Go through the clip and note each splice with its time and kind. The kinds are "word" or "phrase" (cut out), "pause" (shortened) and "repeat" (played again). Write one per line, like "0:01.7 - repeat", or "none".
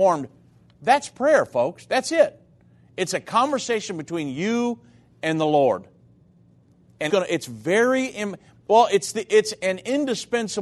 0:07.1 - word